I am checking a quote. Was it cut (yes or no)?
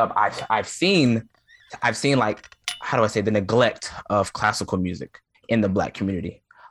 yes